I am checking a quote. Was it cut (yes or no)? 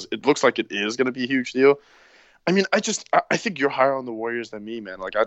no